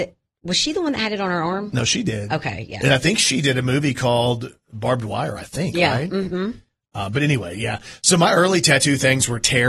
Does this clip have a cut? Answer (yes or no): no